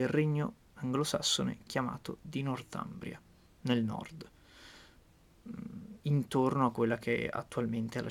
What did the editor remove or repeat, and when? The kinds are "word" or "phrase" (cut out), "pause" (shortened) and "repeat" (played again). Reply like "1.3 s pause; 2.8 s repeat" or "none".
none